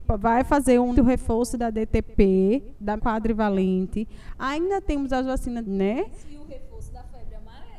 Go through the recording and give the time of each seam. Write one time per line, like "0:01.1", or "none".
0:00.9
0:03.0
0:05.6